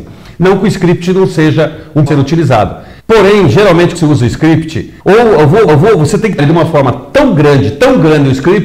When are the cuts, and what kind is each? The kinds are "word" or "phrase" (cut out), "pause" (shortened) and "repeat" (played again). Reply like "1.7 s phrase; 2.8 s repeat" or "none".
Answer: 2.1 s phrase; 3.0 s pause; 3.9 s word; 5.0 s pause; 5.7 s repeat; 6.4 s word